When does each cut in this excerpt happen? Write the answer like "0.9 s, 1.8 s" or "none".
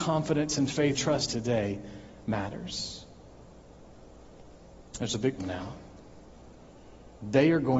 1.0 s, 1.3 s, 5.4 s